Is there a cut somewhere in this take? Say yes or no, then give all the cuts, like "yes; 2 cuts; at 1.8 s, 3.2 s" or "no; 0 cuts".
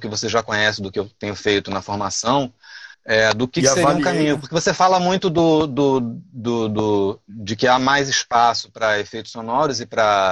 yes; 1 cut; at 2.9 s